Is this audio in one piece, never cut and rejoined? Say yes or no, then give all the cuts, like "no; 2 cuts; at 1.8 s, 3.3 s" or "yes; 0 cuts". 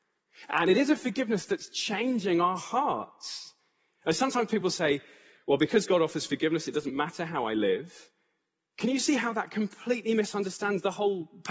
yes; 0 cuts